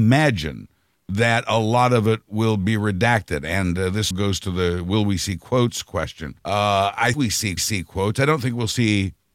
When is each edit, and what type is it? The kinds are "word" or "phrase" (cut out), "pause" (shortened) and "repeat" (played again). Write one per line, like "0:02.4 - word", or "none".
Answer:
0:04.1 - word
0:06.4 - pause
0:07.1 - phrase
0:07.6 - repeat